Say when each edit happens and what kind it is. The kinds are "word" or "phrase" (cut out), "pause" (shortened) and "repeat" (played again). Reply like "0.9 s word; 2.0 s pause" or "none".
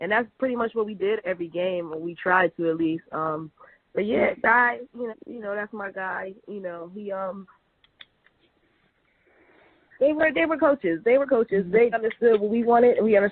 1.2 s word; 3.9 s word; 5.1 s word; 10.6 s word; 11.3 s word; 11.9 s word